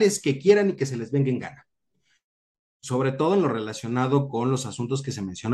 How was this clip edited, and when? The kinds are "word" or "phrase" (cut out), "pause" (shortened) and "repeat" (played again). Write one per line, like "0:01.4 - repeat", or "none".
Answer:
none